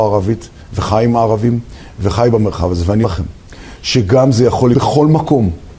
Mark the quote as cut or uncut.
cut